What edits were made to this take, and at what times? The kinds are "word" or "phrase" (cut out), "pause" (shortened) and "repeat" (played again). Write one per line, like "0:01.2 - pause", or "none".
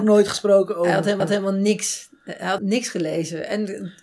0:01.2 - repeat
0:02.6 - word